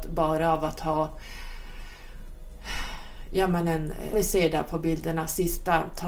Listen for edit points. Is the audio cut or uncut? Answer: cut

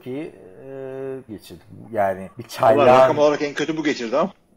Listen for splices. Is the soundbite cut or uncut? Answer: cut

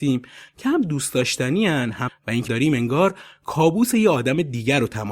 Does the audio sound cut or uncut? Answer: cut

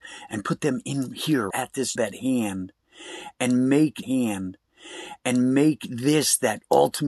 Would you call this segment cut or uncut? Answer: cut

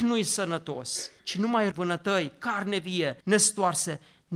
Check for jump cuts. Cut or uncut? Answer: cut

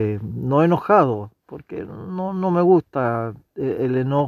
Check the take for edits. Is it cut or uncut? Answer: uncut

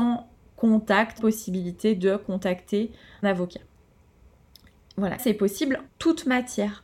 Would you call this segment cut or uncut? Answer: cut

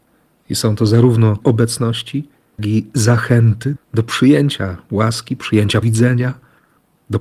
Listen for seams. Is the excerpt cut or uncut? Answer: cut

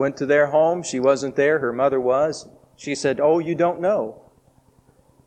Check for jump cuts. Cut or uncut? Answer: uncut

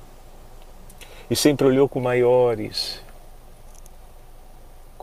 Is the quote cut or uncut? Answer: cut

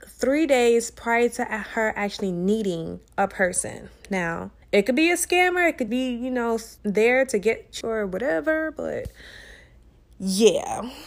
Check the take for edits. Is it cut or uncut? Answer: cut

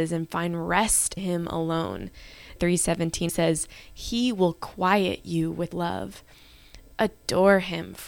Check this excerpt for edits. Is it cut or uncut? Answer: cut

